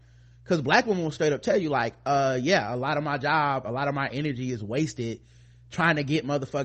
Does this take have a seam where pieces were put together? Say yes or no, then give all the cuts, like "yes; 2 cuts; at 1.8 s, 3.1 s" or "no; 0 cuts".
no; 0 cuts